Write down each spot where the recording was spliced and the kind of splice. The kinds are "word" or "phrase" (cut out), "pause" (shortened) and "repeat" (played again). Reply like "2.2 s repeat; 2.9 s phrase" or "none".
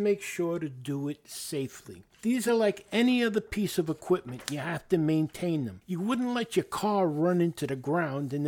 none